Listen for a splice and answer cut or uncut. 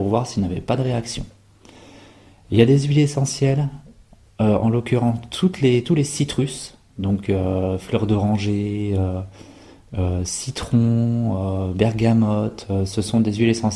uncut